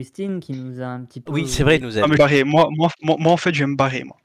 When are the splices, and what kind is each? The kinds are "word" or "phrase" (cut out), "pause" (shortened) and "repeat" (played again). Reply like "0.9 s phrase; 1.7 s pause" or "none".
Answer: 1.8 s phrase; 2.2 s word